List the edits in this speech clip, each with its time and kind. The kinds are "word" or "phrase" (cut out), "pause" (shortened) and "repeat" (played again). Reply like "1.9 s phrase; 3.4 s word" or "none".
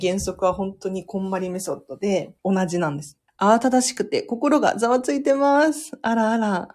2.4 s pause; 3.3 s pause